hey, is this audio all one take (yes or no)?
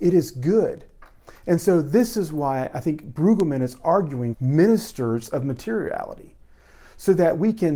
no